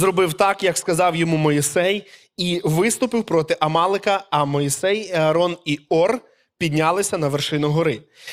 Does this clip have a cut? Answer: no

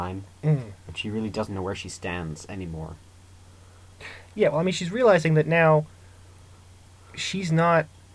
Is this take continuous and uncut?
yes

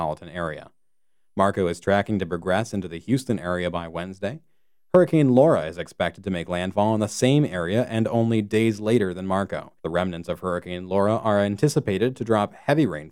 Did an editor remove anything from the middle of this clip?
yes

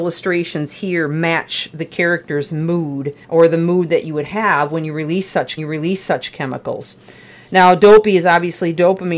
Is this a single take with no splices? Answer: no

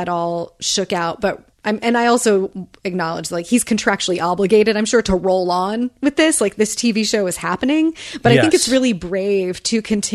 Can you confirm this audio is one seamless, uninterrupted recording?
no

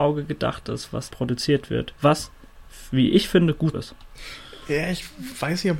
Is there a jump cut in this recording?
yes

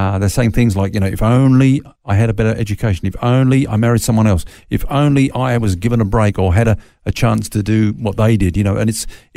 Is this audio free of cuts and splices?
no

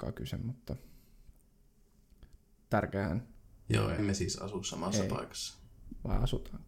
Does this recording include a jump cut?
yes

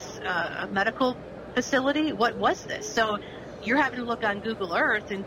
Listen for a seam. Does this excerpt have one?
no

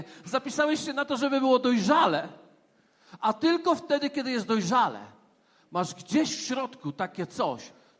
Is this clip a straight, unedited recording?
yes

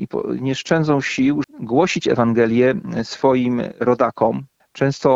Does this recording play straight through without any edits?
no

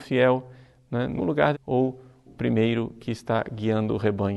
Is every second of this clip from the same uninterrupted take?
no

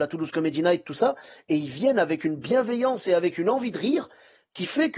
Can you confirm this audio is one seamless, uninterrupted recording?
yes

